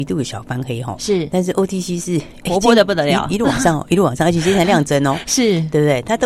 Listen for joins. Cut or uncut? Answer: uncut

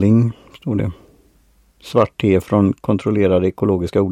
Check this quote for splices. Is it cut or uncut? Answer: uncut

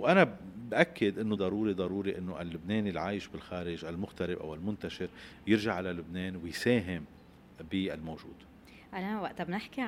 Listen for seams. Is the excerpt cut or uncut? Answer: cut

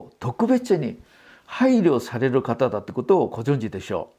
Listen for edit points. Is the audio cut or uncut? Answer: uncut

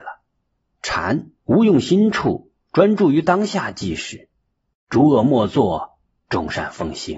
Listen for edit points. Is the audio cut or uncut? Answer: cut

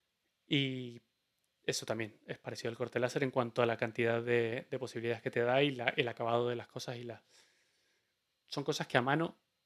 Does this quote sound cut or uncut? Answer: uncut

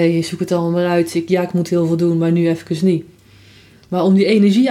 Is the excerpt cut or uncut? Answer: uncut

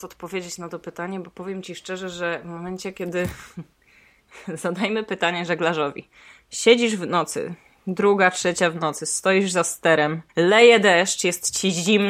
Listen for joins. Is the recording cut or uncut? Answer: cut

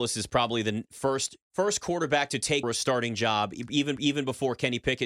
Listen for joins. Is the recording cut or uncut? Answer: cut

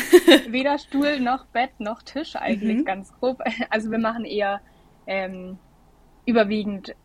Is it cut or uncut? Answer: uncut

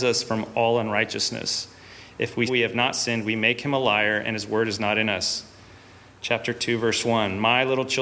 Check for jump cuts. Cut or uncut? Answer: cut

